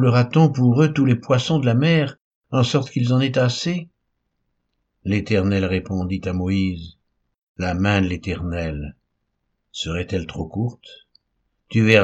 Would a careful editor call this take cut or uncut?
uncut